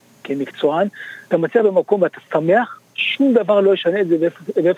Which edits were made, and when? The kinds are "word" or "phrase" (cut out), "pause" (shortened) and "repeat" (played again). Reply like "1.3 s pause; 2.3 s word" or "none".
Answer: 1.3 s word; 2.9 s pause